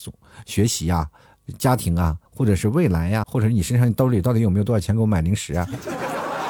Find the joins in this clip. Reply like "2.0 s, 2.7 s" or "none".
2.3 s, 3.2 s